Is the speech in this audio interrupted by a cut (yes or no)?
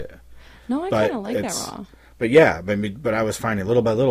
no